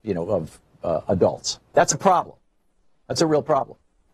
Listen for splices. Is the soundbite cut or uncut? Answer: cut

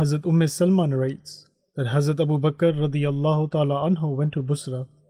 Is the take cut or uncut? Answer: uncut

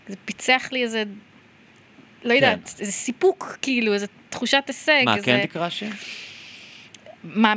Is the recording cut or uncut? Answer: uncut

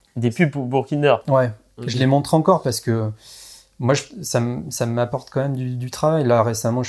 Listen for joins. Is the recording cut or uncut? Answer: uncut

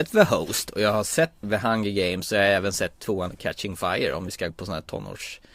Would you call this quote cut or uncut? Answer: cut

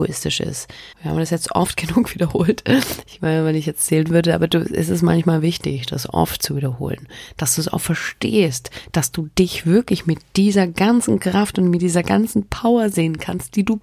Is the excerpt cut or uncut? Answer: cut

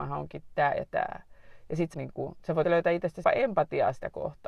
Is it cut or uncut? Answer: cut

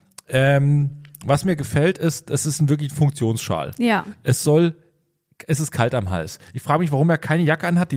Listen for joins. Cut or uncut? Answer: uncut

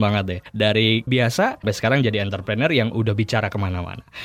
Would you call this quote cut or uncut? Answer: cut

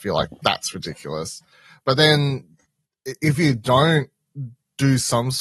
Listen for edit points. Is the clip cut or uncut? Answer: uncut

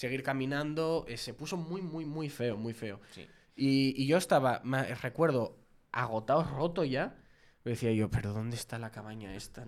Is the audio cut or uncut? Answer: uncut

